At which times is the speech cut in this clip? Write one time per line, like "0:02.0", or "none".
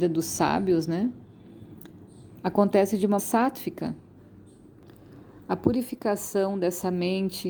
0:03.2

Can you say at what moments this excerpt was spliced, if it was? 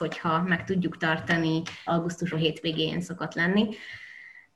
0:01.9
0:02.3

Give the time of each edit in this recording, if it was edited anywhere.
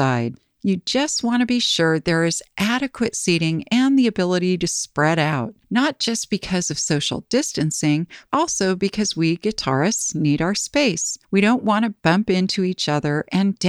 none

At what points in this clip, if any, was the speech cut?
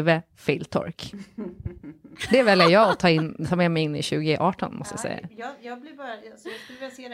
none

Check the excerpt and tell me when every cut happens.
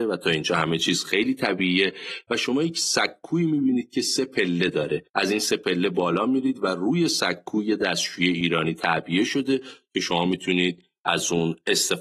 0:05.1

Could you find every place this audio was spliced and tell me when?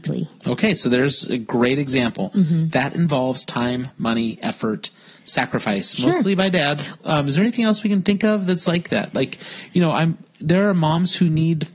none

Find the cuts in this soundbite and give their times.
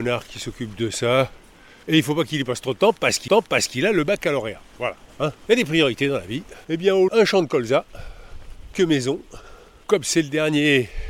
0:03.3
0:05.4
0:06.6
0:07.1
0:08.7

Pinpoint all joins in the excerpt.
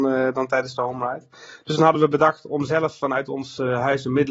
none

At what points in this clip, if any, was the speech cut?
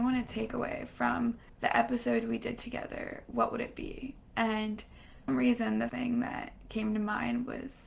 0:05.3
0:05.9

